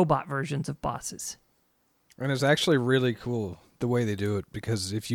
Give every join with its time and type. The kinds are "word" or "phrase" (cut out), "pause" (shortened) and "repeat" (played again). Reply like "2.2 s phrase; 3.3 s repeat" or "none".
none